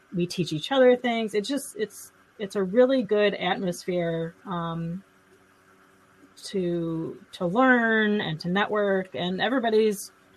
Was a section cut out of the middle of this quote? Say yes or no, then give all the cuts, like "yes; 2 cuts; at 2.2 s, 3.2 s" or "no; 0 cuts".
no; 0 cuts